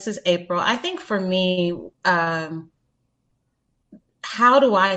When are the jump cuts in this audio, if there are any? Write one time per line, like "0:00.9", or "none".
0:01.9